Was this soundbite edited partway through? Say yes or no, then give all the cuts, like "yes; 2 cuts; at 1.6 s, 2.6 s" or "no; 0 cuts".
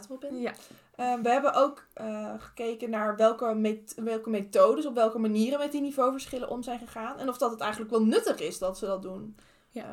no; 0 cuts